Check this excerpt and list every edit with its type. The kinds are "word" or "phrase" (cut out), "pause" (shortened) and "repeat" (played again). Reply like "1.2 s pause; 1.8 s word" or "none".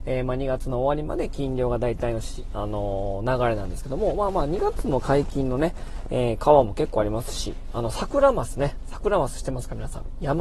none